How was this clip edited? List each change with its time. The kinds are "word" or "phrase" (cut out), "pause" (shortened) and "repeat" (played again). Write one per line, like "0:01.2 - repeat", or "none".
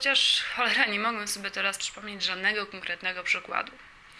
none